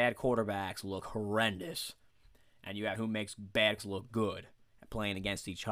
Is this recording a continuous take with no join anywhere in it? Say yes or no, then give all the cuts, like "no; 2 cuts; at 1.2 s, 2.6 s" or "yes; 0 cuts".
no; 2 cuts; at 3.0 s, 3.8 s